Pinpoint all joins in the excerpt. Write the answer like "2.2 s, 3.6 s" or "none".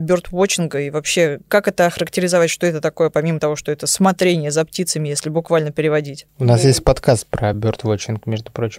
none